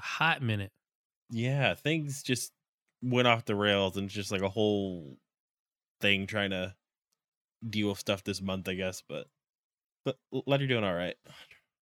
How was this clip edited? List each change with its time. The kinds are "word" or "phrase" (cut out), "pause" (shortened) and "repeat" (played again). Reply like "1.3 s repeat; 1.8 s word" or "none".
none